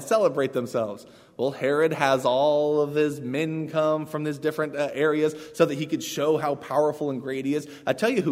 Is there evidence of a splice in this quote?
no; 0 cuts

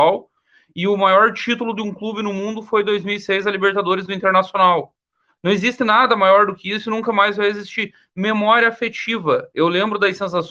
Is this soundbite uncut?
yes; 0 cuts

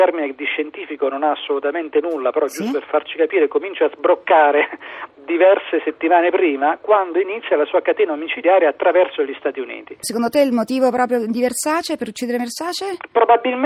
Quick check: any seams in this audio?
no; 0 cuts

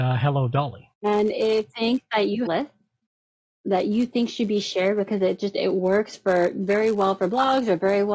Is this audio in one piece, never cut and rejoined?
no; 4 cuts; at 0.9 s, 1.7 s, 2.5 s, 5.1 s

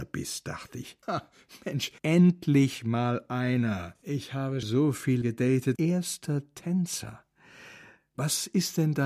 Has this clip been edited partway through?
yes; 5 cuts; at 1.0 s, 2.0 s, 4.6 s, 5.2 s, 5.8 s

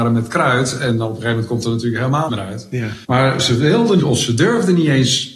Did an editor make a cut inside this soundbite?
yes; 3 cuts; at 2.3 s, 3.0 s, 4.0 s

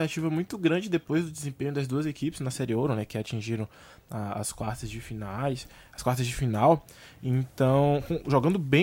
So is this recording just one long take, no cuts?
yes; 0 cuts

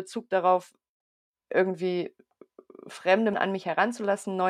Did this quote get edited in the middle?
yes; 1 cut; at 3.3 s

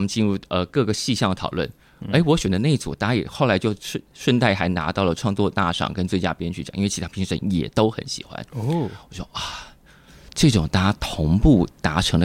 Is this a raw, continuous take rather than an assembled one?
yes; 0 cuts

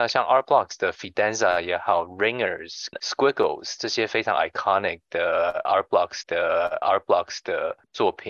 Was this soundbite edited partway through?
yes; 2 cuts; at 2.9 s, 6.2 s

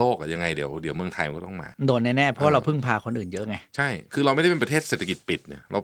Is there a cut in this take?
yes; 1 cut; at 1.7 s

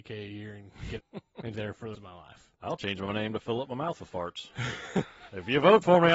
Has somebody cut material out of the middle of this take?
yes; 3 cuts; at 1.0 s, 1.5 s, 1.9 s

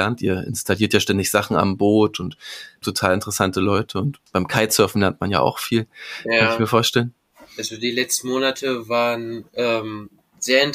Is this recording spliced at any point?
yes; 1 cut; at 2.8 s

